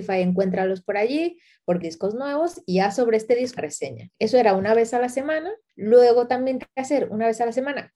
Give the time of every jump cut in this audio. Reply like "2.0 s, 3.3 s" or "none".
1.8 s, 3.6 s, 6.6 s